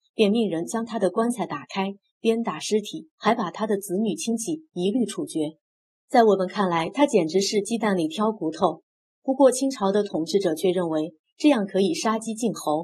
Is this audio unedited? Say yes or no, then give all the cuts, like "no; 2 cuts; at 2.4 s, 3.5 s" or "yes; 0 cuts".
no; 2 cuts; at 3.1 s, 5.9 s